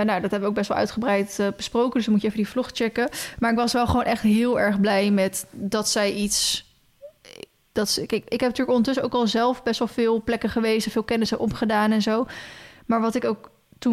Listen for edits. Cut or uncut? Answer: uncut